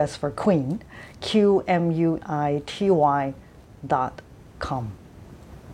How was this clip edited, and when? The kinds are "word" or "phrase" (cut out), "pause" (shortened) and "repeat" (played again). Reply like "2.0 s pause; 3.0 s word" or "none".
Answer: 2.2 s word